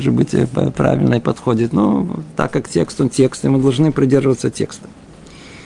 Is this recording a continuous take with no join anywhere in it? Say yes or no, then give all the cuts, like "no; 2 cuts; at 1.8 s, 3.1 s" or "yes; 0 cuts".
yes; 0 cuts